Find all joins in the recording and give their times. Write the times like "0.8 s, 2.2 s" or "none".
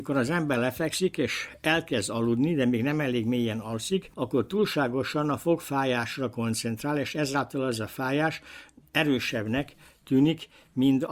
none